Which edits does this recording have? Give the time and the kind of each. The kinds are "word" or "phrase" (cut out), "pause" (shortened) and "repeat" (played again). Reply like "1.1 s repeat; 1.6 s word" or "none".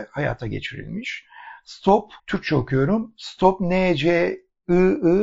2.2 s pause

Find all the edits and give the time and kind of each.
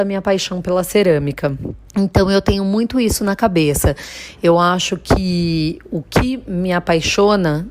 1.9 s pause

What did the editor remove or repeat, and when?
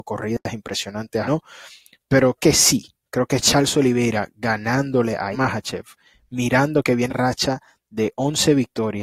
1.2 s word; 2.4 s word; 5.3 s word; 7.1 s word

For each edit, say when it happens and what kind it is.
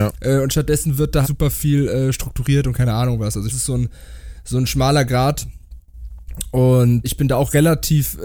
1.2 s word; 3.5 s phrase; 7.0 s word

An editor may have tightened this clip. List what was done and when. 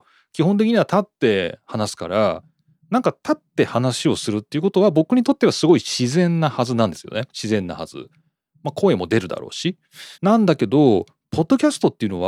7.3 s pause; 10.1 s pause

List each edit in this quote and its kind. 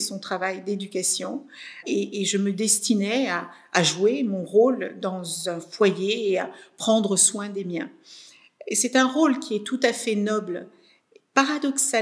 1.8 s word

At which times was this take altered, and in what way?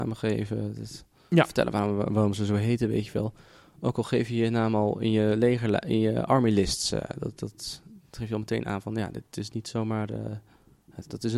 none

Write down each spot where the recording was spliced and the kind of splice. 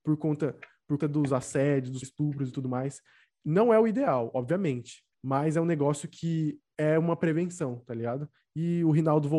1.0 s word; 2.0 s word; 5.1 s pause

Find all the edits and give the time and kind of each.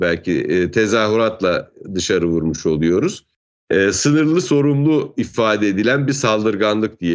none

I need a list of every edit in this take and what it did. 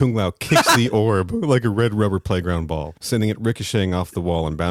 3.0 s pause

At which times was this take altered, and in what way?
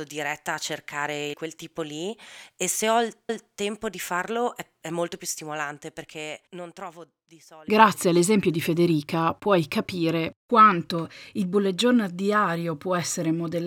1.3 s phrase; 3.3 s repeat; 6.5 s pause

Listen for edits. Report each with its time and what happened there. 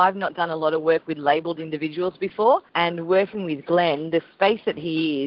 2.7 s pause

